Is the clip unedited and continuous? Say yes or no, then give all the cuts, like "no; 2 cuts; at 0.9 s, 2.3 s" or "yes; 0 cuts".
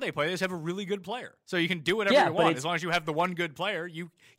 no; 1 cut; at 1.4 s